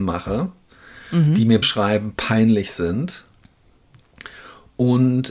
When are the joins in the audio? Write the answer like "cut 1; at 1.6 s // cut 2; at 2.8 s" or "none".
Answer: cut 1; at 1.6 s